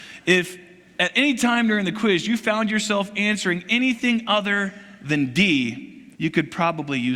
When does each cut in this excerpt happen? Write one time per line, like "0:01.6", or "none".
0:06.1

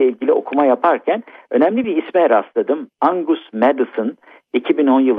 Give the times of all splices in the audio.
none

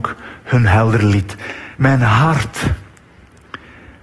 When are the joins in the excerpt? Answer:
0:01.7

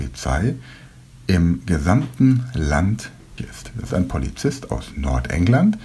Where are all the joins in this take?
0:03.4
0:03.9

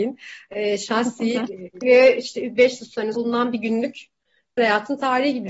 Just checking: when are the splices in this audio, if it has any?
0:01.8
0:03.1
0:04.6

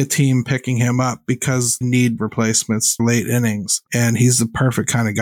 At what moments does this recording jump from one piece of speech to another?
0:01.8
0:02.2
0:03.0
0:03.9

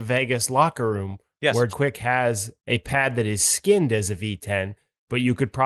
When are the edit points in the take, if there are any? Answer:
0:01.7
0:02.6

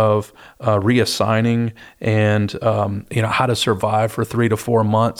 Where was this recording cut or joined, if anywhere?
none

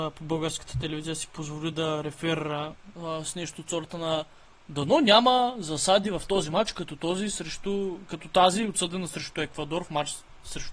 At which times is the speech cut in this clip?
none

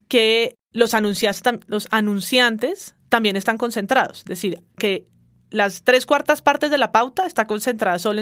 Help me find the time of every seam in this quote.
none

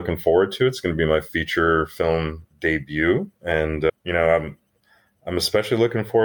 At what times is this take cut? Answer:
0:03.4
0:04.0

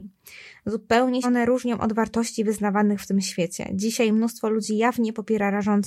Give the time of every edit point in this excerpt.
0:01.2

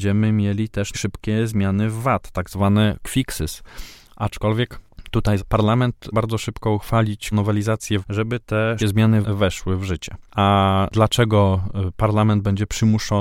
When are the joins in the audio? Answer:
0:00.9
0:03.0
0:05.4
0:06.1
0:07.3
0:08.0
0:08.8
0:09.2

